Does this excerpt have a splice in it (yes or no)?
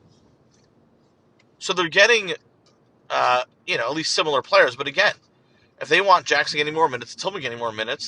no